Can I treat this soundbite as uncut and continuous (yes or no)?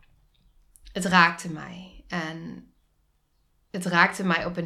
yes